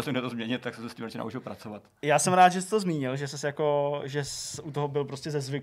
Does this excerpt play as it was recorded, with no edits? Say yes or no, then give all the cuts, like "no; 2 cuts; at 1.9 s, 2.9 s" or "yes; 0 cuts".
yes; 0 cuts